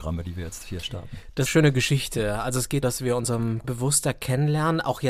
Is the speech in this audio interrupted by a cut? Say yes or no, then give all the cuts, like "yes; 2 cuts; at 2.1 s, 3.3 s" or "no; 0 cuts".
yes; 3 cuts; at 1.5 s, 2.8 s, 3.6 s